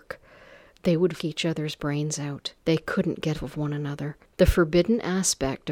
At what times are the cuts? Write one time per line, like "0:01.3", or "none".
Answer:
0:01.2
0:02.6
0:03.3
0:04.2